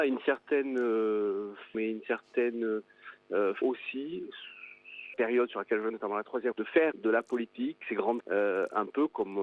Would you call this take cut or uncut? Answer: cut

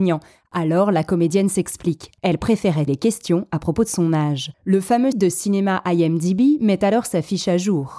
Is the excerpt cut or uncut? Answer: cut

